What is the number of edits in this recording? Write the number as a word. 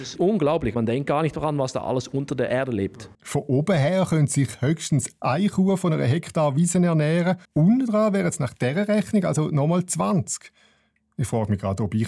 two